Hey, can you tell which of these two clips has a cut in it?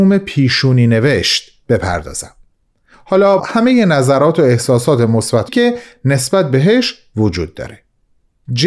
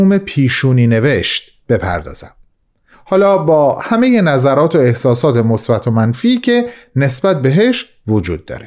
first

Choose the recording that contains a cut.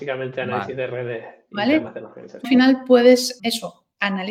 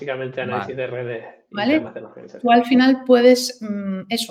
first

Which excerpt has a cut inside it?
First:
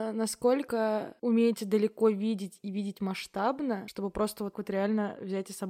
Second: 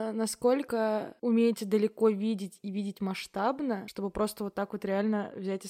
first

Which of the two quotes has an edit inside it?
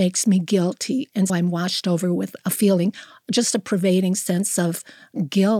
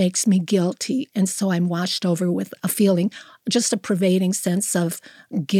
first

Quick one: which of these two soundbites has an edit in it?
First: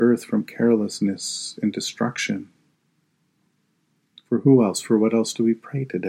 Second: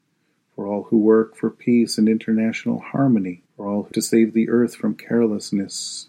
second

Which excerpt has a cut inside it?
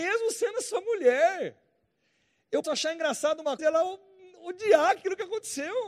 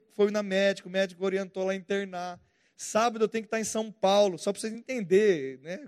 first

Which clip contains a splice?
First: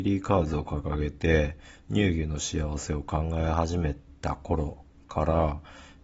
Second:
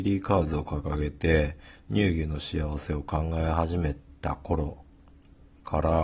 first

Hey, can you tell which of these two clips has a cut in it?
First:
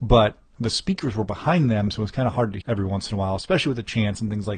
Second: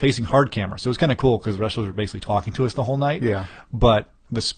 first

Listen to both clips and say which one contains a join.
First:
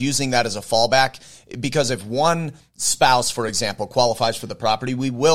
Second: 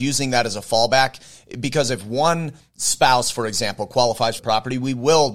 second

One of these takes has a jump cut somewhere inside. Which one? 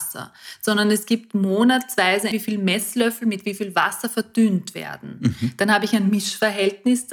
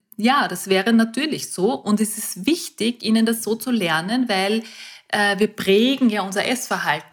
first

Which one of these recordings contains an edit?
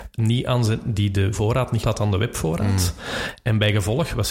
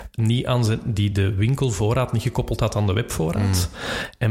first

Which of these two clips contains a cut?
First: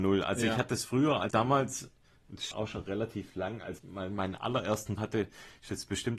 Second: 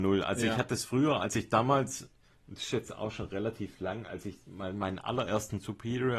first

